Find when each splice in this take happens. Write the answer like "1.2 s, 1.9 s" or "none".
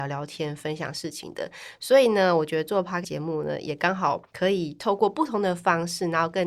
3.0 s